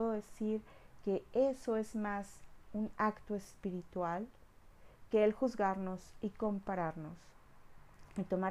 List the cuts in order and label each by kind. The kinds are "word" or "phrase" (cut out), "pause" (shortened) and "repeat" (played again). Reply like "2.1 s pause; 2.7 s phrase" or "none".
none

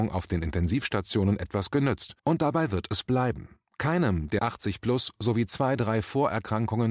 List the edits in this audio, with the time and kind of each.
2.2 s pause; 4.4 s word

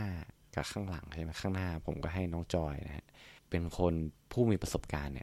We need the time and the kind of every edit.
3.4 s pause

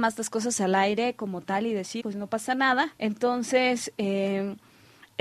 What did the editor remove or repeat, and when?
2.0 s word; 2.9 s word

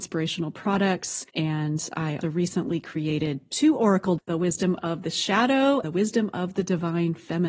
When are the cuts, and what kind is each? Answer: 1.3 s pause; 2.2 s word; 4.2 s word; 5.8 s word

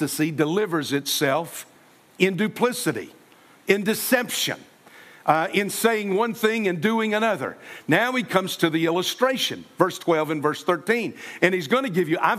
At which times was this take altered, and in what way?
none

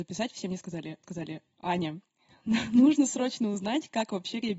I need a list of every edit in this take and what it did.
1.0 s repeat

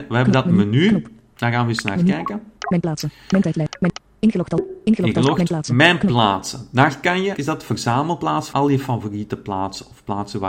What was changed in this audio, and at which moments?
2.6 s pause; 7.3 s word; 8.5 s word

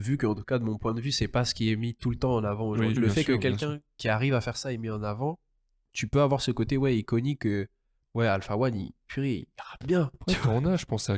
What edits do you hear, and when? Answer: 3.0 s word

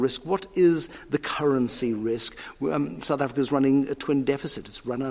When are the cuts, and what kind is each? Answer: none

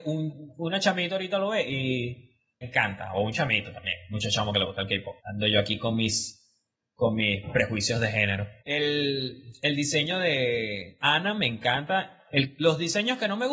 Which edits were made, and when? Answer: 2.6 s phrase; 5.2 s pause; 8.6 s pause

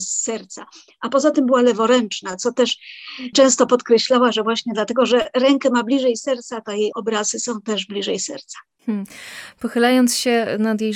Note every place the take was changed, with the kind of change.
none

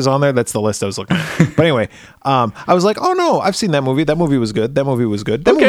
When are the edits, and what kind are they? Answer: none

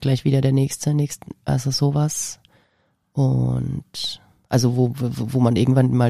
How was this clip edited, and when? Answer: none

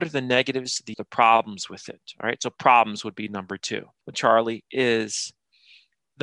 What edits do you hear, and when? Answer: 0.9 s word; 4.1 s word

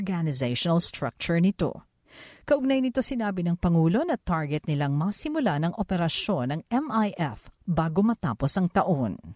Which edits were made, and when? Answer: none

